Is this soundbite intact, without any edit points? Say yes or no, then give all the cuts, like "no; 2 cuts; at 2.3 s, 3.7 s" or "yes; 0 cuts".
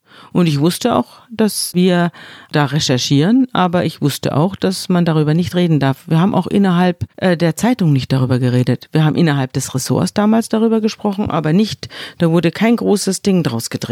no; 1 cut; at 7.1 s